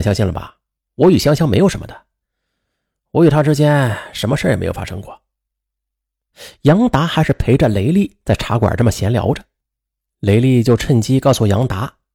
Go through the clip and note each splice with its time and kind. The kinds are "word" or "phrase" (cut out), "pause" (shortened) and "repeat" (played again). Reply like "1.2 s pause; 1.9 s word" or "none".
none

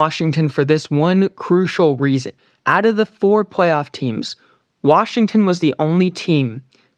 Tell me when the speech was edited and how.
2.4 s pause

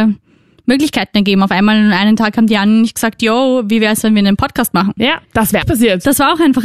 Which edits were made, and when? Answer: 5.2 s pause; 5.6 s word

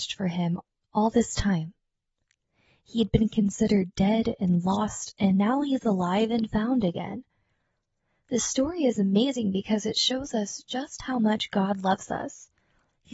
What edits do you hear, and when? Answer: none

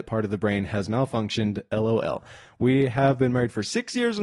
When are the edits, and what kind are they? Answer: none

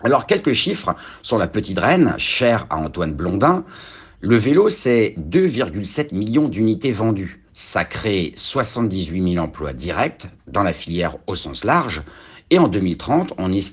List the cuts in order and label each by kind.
7.5 s pause; 10.4 s pause

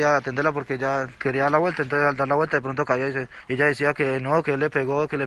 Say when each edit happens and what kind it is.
none

